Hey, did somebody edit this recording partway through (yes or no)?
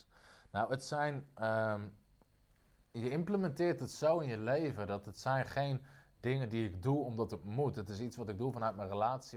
no